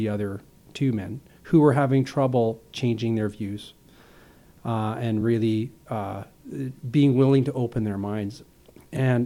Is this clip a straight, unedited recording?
yes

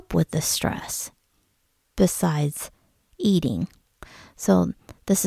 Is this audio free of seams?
yes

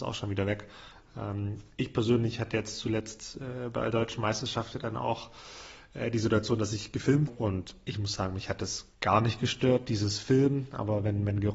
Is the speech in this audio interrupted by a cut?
yes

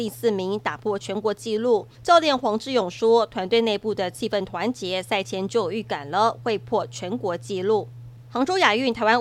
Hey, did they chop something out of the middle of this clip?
yes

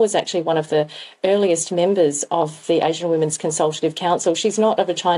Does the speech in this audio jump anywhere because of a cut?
no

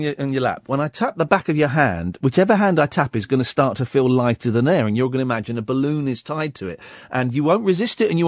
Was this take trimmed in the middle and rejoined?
no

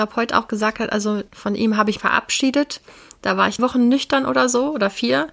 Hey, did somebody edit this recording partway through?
yes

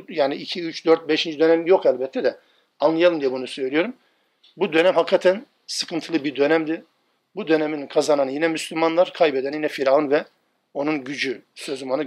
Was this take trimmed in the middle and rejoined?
no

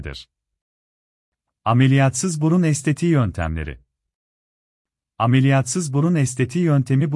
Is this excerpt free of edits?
yes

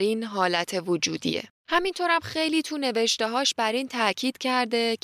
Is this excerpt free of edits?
no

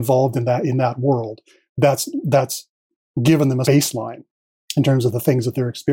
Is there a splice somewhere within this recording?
yes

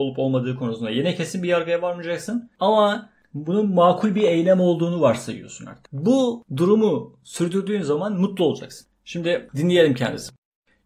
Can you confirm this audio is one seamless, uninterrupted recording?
yes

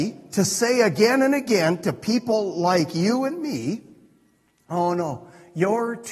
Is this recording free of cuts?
yes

